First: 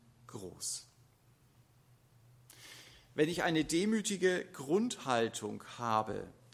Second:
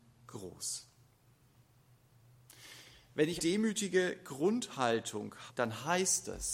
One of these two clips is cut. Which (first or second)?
second